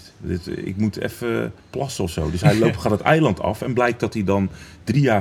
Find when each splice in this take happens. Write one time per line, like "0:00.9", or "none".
0:01.6